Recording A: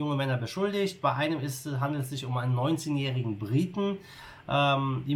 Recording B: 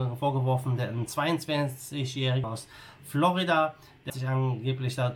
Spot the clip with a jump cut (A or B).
B